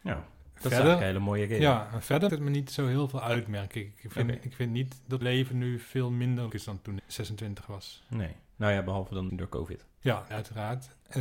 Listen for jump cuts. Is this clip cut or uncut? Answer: cut